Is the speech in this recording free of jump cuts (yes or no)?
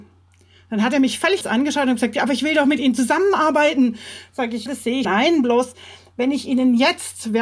no